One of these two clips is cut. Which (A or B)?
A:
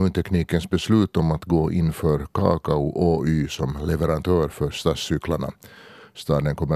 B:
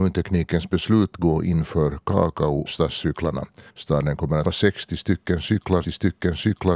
B